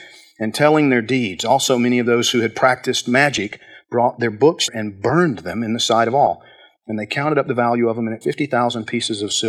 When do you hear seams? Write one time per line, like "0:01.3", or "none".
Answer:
0:04.7
0:08.2